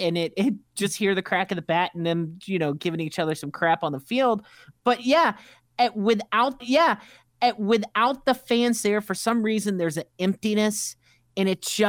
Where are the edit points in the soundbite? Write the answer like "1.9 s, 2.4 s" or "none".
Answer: 6.6 s